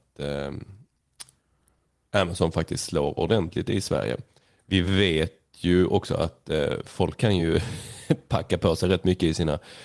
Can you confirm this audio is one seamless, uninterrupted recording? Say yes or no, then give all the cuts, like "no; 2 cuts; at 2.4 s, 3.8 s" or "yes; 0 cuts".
yes; 0 cuts